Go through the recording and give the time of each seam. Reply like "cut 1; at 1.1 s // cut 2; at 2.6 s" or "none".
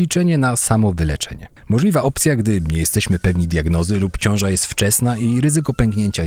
cut 1; at 1.6 s